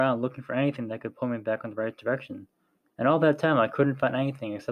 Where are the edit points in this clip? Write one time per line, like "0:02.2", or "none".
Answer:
none